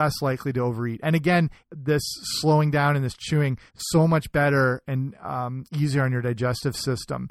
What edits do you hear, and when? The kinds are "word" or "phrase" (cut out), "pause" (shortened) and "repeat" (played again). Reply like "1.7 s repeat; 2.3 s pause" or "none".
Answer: 1.6 s pause; 3.7 s pause